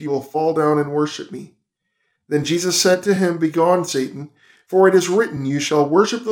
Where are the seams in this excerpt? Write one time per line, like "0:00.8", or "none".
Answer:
none